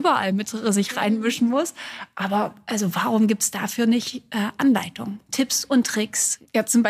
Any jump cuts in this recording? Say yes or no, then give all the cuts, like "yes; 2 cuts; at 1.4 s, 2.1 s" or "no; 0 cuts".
no; 0 cuts